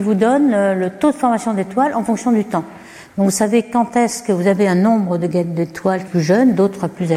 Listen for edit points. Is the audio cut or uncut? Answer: cut